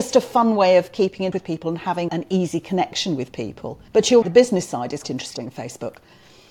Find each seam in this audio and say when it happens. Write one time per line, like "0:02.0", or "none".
0:01.3
0:02.1
0:03.9
0:04.2
0:05.0

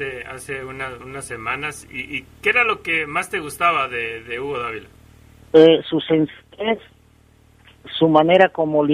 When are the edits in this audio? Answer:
none

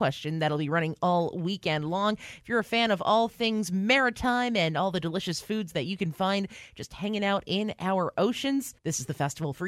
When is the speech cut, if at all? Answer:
0:08.8

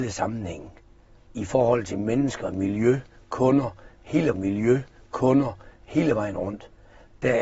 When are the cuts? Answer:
0:04.3

